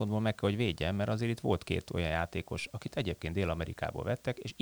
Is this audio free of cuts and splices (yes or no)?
yes